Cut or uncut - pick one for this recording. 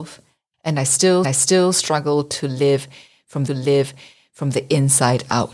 cut